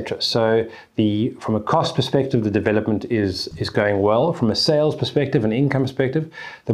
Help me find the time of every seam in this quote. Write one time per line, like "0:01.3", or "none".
0:03.5